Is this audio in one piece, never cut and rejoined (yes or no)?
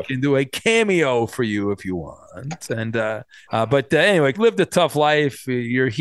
no